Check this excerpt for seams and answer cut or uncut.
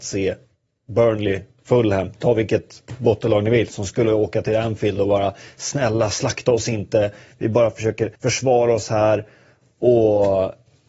cut